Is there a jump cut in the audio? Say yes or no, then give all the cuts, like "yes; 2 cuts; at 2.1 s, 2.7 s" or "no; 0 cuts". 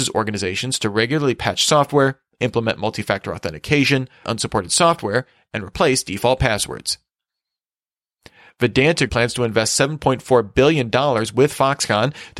yes; 2 cuts; at 4.2 s, 9.1 s